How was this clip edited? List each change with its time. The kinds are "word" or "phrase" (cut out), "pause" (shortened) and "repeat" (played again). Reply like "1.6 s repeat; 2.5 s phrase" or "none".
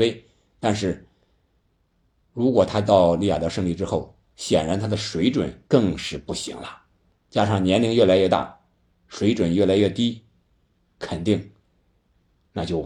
5.7 s pause

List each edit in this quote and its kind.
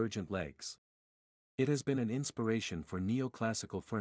none

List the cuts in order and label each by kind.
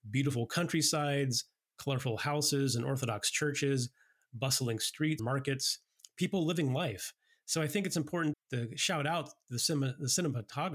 5.2 s word; 8.3 s word

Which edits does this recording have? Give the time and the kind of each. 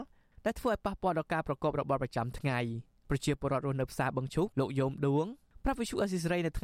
4.5 s pause

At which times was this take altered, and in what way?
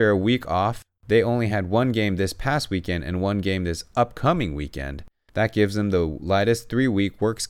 none

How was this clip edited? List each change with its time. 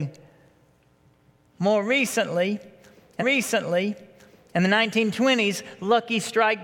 3.2 s repeat

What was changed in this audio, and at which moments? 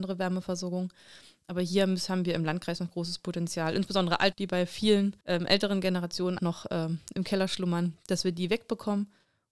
4.3 s word; 5.2 s pause; 6.4 s word

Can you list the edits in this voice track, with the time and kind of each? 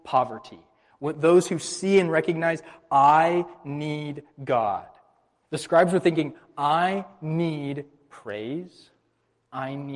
none

